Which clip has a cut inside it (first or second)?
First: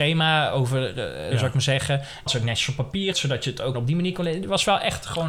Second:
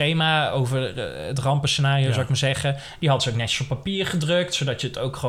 first